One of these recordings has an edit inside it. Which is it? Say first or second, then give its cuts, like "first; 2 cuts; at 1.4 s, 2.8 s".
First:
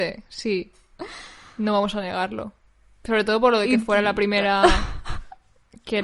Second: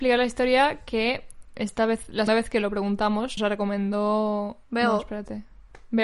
second; 4 cuts; at 1.5 s, 2.3 s, 3.4 s, 4.6 s